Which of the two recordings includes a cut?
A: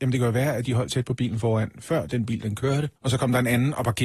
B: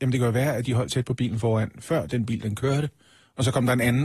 A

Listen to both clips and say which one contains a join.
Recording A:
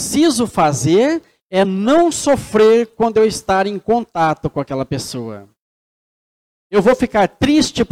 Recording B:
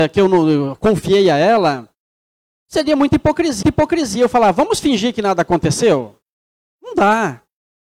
B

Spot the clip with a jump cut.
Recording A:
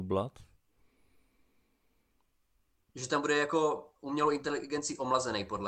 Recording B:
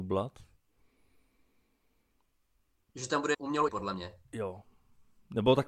B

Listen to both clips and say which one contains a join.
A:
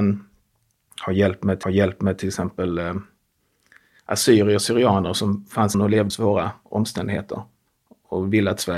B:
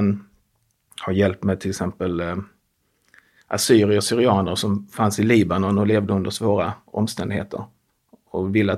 A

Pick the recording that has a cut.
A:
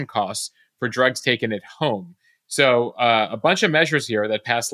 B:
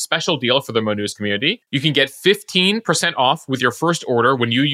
B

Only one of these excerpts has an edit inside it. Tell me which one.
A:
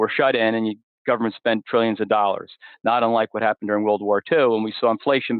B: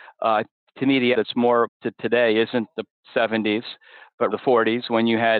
B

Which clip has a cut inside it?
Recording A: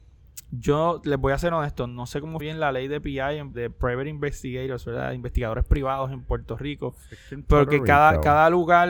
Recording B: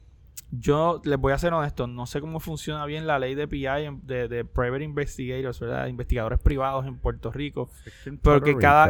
A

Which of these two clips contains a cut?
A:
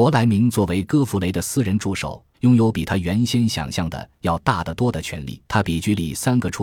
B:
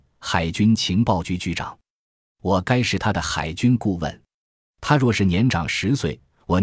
A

